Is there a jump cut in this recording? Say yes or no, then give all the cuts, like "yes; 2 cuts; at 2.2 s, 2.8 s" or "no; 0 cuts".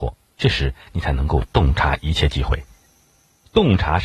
no; 0 cuts